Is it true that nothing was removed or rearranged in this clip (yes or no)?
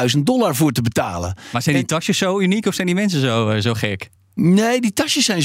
yes